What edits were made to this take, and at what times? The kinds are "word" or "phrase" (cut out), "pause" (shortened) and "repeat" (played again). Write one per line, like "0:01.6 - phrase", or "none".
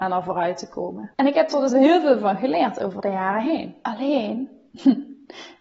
none